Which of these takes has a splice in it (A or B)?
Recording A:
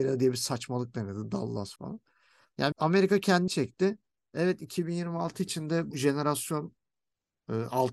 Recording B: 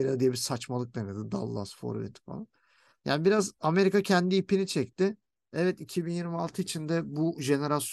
A